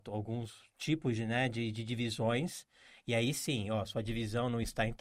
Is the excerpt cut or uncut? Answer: uncut